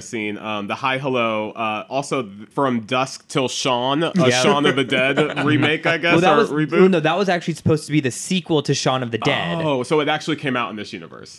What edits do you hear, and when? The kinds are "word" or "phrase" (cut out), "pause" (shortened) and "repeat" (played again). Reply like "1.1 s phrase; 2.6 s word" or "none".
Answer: 2.5 s word